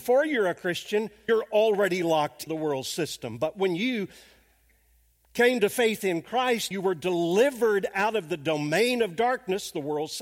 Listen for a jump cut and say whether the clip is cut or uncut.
cut